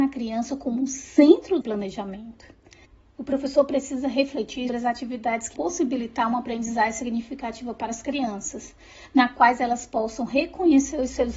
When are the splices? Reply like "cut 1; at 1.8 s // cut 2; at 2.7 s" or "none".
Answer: cut 1; at 1.6 s // cut 2; at 4.7 s // cut 3; at 5.5 s